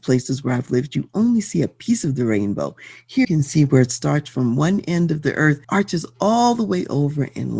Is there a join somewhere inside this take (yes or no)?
yes